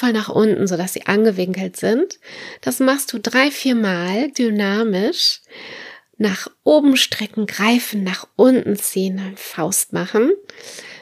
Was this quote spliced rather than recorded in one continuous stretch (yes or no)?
yes